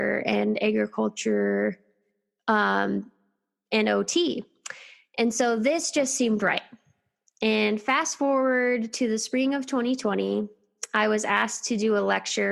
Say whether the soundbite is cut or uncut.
uncut